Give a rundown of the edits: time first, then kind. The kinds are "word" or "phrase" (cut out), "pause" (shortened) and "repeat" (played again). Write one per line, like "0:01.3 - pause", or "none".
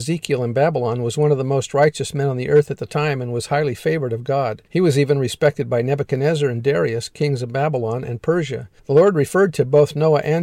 0:04.7 - pause
0:08.8 - pause